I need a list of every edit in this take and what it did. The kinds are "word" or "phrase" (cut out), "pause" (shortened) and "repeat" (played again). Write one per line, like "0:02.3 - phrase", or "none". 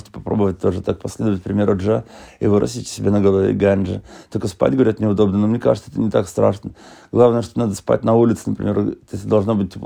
none